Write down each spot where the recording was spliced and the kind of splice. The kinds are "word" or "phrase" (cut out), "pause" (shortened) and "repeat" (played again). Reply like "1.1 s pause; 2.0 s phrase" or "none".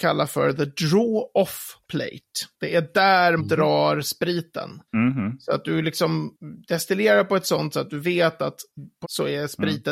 3.4 s word; 7.7 s word; 9.0 s phrase